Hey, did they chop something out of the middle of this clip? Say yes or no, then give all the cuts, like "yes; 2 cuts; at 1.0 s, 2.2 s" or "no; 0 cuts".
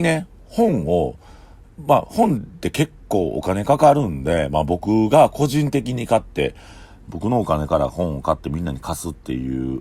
no; 0 cuts